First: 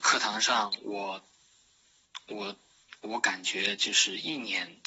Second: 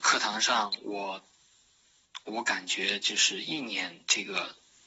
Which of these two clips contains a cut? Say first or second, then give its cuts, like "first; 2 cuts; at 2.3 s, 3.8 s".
second; 1 cut; at 2.2 s